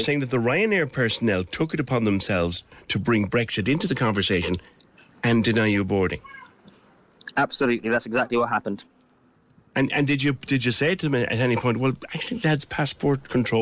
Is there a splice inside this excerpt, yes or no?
no